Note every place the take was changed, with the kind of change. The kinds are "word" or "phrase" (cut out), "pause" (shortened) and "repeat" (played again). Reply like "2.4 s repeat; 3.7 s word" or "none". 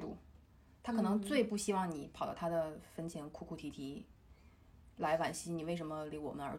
none